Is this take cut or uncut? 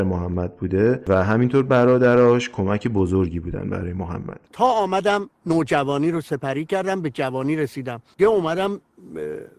cut